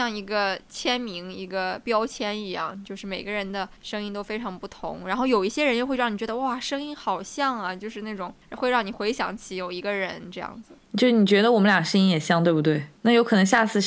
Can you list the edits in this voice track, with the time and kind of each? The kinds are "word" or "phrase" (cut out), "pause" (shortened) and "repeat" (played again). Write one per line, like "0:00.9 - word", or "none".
0:03.8 - pause
0:08.4 - pause
0:10.8 - pause
0:13.0 - pause